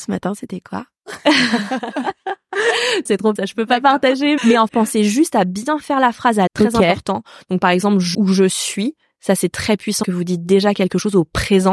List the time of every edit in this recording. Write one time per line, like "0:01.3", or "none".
0:03.1
0:03.4
0:04.4
0:04.7
0:06.5
0:08.1
0:10.0

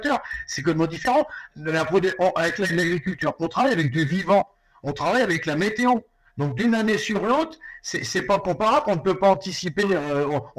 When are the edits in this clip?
none

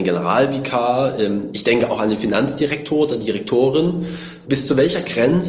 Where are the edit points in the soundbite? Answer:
none

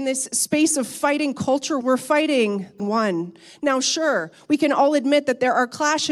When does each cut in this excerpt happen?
0:01.8
0:02.8

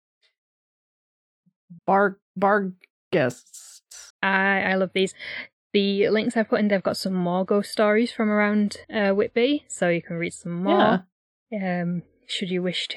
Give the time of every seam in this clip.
0:01.8
0:04.1
0:08.8
0:11.2

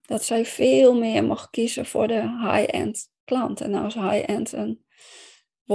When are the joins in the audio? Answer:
none

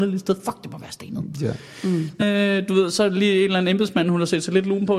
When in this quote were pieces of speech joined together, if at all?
0:02.2

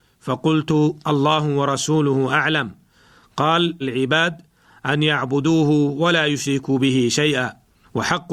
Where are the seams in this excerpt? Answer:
0:03.8

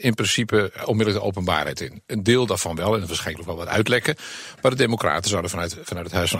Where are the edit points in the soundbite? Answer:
0:03.3

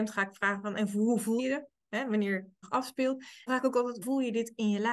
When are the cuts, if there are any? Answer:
0:01.4
0:02.6
0:03.5
0:04.0

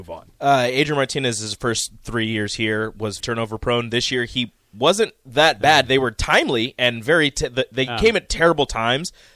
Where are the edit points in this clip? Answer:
0:03.2

